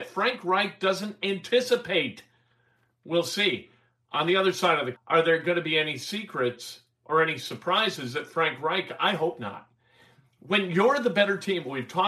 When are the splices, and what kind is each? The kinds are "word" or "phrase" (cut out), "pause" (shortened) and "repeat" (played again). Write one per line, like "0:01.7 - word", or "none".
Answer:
0:04.9 - word